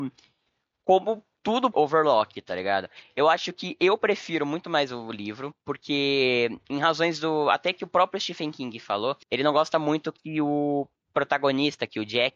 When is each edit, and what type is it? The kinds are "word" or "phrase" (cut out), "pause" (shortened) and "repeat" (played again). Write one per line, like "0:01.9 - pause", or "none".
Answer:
0:01.7 - phrase
0:09.2 - pause